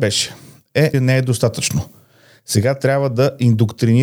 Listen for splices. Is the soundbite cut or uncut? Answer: cut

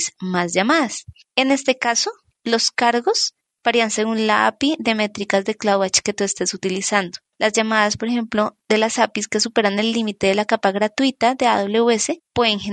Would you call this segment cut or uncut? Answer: uncut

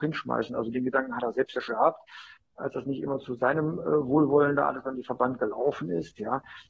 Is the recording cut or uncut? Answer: cut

